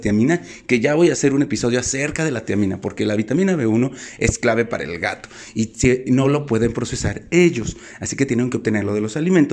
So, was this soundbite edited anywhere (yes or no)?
no